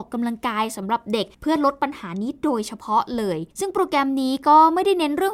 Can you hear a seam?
yes; 2 cuts; at 1.3 s, 3.5 s

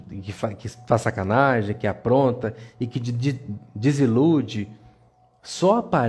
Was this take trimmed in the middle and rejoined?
no; 0 cuts

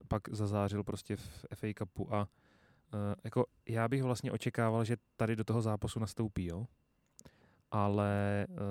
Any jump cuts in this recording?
no; 0 cuts

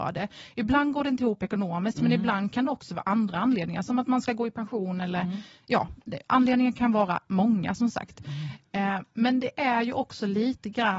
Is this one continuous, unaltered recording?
yes; 0 cuts

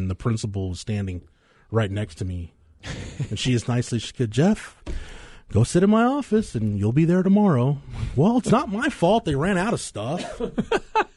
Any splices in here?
no; 0 cuts

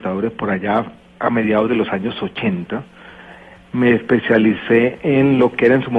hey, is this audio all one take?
yes; 0 cuts

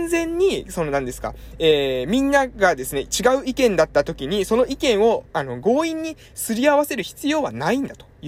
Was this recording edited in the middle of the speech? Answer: yes; 1 cut; at 5.3 s

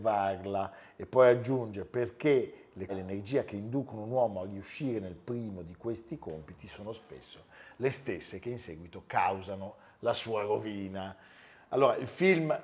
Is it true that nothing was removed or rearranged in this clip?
no; 1 cut; at 2.9 s

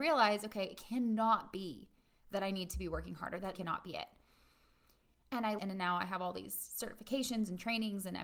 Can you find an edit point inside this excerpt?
yes; 2 cuts; at 3.5 s, 5.6 s

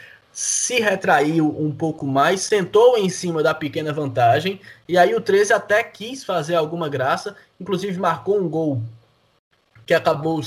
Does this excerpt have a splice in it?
no; 0 cuts

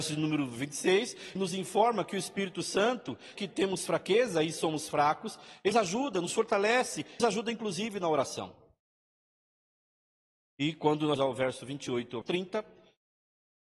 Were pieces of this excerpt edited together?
yes; 6 cuts; at 1.4 s, 3.4 s, 5.7 s, 7.2 s, 11.2 s, 12.2 s

